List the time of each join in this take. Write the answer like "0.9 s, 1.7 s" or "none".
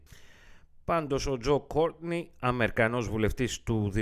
none